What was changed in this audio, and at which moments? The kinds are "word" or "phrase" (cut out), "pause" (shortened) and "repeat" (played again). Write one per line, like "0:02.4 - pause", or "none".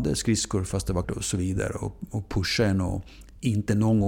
0:01.0 - word